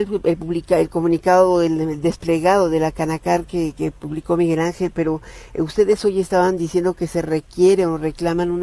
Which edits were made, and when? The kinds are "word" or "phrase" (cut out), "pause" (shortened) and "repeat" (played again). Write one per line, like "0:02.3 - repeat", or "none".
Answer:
none